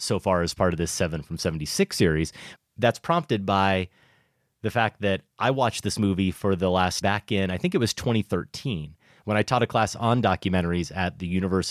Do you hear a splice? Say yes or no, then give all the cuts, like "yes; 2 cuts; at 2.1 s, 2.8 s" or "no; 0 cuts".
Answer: yes; 2 cuts; at 2.6 s, 7.0 s